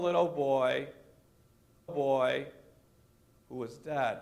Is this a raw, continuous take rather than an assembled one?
no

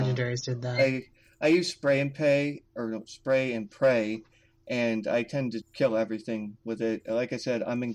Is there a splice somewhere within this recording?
yes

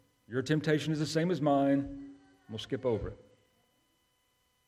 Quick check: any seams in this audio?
no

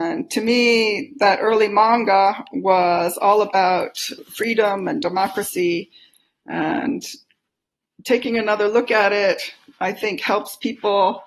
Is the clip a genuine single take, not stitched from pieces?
yes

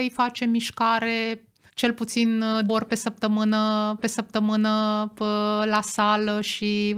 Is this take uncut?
no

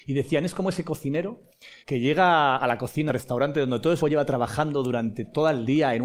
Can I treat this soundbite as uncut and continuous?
no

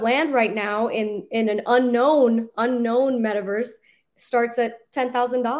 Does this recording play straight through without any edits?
yes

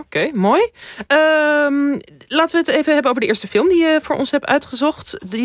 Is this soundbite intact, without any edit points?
yes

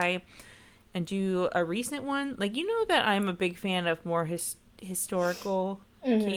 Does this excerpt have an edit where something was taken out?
no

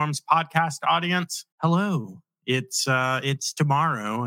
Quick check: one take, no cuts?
no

